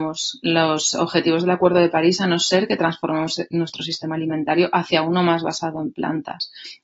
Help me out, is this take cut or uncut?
uncut